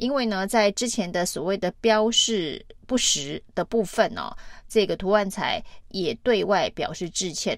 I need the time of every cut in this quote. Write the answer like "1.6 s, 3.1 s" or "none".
2.8 s, 3.5 s